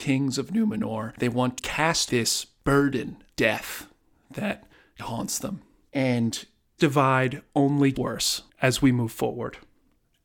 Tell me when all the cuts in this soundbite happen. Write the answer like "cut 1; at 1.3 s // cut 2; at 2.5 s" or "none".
cut 1; at 1.6 s // cut 2; at 2.1 s // cut 3; at 3.3 s // cut 4; at 5.0 s // cut 5; at 6.8 s // cut 6; at 7.9 s

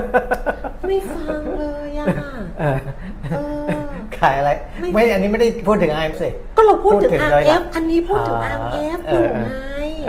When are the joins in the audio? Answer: cut 1; at 6.1 s

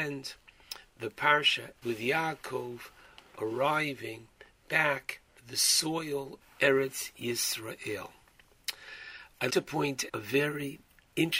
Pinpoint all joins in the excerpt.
cut 1; at 1.8 s // cut 2; at 5.4 s // cut 3; at 6.4 s // cut 4; at 9.5 s // cut 5; at 10.1 s

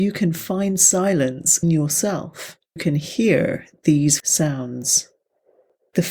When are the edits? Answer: cut 1; at 1.6 s // cut 2; at 2.8 s // cut 3; at 4.2 s

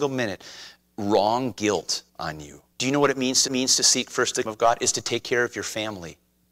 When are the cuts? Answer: cut 1; at 2.1 s // cut 2; at 2.7 s // cut 3; at 3.5 s // cut 4; at 4.5 s

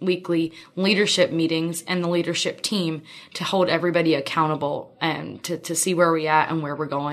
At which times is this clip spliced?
none

